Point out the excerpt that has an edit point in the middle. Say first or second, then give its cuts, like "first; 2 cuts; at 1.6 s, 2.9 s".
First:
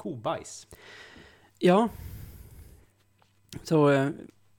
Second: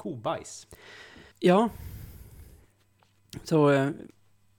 second; 1 cut; at 1.3 s